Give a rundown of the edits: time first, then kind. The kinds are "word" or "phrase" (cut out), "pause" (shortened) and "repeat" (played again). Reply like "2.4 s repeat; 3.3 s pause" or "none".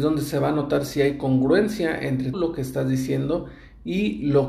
2.3 s word